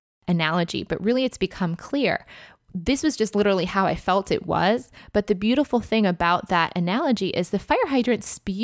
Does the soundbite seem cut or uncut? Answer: uncut